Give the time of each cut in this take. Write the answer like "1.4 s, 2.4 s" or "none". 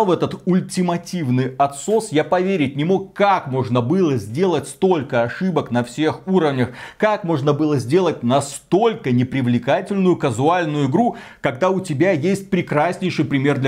none

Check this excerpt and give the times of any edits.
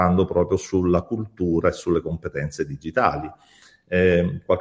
none

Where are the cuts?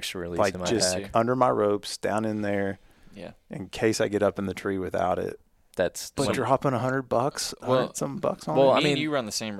none

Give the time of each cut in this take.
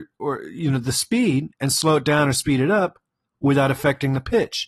none

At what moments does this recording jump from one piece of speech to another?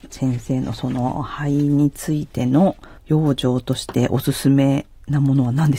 3.0 s

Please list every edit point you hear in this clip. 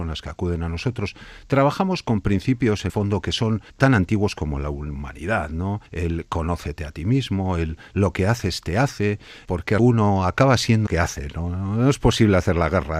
2.9 s, 3.7 s, 5.9 s, 9.8 s, 10.9 s

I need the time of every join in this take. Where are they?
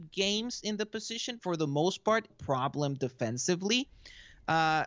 1.4 s, 2.3 s

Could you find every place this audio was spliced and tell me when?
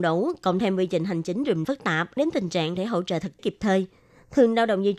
1.6 s, 2.2 s, 2.8 s, 3.4 s

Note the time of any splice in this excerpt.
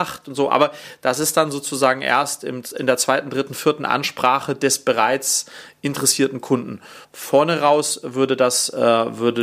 7.0 s

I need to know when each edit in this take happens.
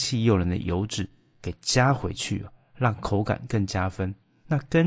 none

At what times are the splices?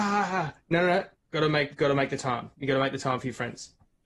1.1 s, 1.7 s

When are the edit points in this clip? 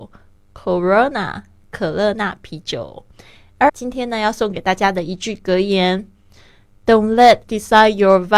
3.7 s, 7.4 s

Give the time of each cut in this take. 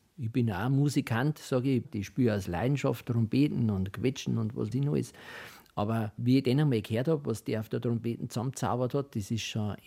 4.7 s

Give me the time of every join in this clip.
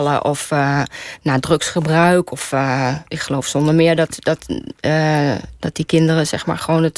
3.1 s

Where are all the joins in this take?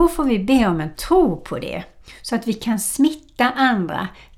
none

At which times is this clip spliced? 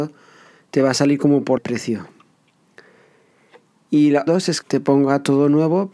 1.6 s, 4.3 s, 4.6 s

